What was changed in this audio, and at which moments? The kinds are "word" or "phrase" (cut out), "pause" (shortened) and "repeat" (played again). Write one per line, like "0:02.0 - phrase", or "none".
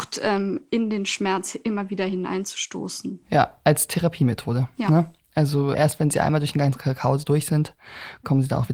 0:05.7 - word